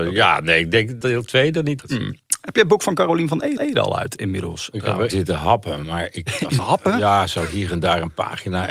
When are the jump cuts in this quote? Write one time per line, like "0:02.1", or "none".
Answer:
0:01.0
0:01.8
0:03.6
0:04.2
0:05.1
0:06.6